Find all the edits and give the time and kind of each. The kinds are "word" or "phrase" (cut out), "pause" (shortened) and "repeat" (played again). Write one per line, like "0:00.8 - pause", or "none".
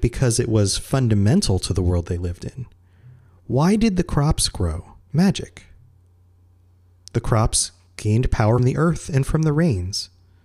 0:05.0 - pause
0:08.6 - word